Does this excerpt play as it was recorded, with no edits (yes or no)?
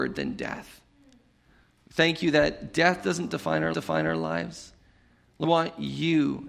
no